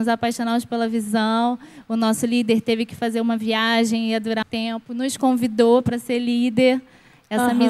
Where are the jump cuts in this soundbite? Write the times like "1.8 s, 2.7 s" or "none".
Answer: 4.4 s